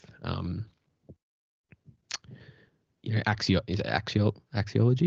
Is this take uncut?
yes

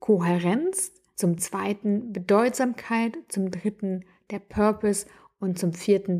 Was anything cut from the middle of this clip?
no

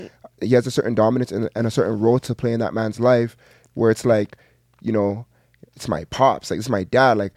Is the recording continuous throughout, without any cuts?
yes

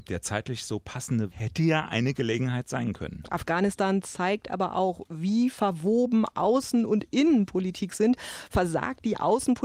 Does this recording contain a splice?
yes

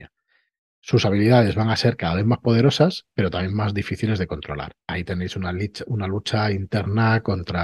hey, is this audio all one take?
yes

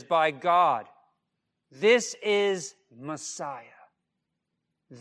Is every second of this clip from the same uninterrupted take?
yes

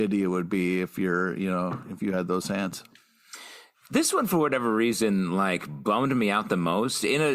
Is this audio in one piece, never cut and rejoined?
yes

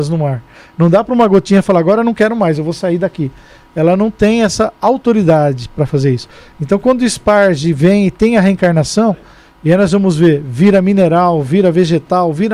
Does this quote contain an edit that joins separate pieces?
no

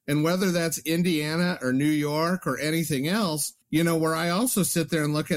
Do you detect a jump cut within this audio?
yes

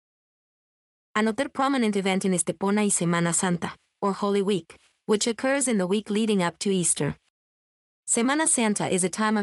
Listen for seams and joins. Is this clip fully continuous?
yes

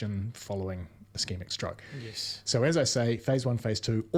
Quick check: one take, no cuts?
yes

